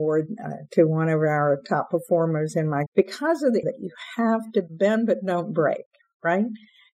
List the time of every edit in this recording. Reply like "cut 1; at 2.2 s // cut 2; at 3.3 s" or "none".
cut 1; at 2.9 s // cut 2; at 3.6 s